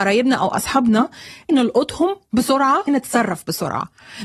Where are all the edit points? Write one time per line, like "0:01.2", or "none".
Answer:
0:01.5
0:02.9